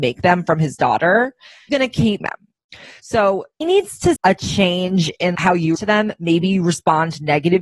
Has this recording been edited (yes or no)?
yes